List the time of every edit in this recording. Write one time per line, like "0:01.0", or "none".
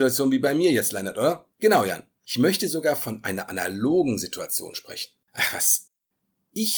0:01.5